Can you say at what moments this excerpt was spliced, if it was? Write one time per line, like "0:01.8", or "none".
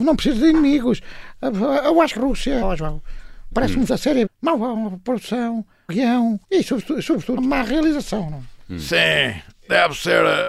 0:02.2
0:02.6
0:03.5
0:03.9
0:04.3
0:05.9
0:06.4
0:07.4